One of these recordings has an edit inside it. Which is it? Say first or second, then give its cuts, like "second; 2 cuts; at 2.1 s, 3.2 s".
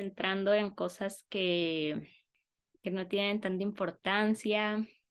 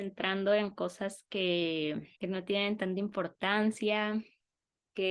second; 1 cut; at 2.2 s